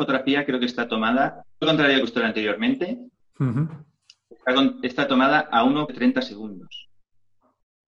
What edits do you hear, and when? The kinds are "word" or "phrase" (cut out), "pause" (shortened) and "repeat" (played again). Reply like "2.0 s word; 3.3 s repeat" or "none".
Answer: 1.6 s word; 2.0 s word; 5.1 s word; 5.9 s word